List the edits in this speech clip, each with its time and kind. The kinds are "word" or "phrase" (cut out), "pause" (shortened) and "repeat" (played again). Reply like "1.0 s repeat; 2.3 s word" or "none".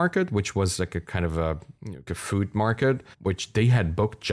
3.1 s pause